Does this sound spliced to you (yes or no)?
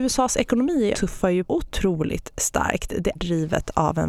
yes